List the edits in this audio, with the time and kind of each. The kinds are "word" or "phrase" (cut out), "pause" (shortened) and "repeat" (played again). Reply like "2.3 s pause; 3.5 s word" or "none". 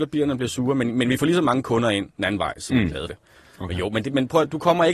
3.1 s word